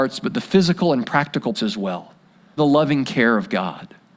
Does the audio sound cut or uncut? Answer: cut